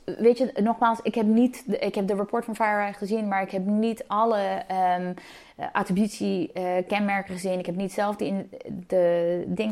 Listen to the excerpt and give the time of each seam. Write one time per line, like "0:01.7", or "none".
none